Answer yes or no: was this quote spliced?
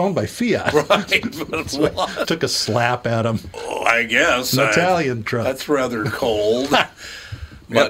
yes